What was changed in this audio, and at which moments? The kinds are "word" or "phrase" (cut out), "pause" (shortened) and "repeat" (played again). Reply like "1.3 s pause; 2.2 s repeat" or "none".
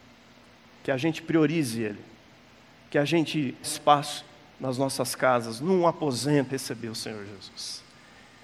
3.6 s word; 6.5 s word